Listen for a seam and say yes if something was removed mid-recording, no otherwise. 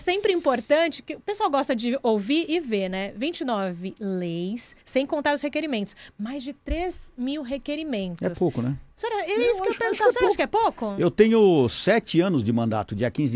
yes